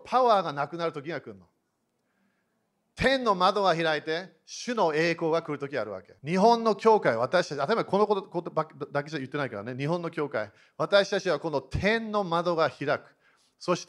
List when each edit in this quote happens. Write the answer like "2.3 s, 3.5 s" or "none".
6.2 s